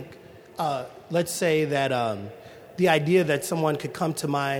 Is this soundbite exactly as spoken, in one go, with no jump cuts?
yes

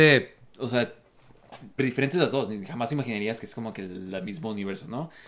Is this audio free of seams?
no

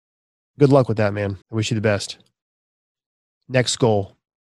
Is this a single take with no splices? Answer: no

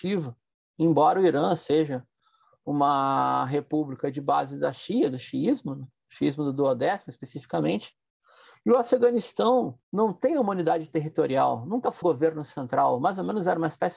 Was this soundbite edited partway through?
yes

